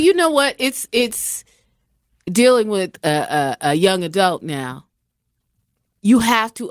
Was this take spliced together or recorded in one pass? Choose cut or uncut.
uncut